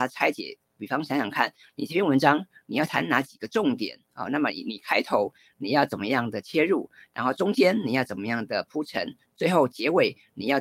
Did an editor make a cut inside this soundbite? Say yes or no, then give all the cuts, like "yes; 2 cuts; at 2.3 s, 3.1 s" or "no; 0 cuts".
no; 0 cuts